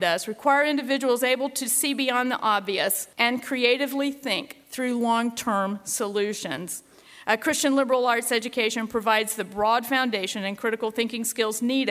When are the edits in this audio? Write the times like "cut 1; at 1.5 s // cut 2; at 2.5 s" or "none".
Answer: cut 1; at 3.1 s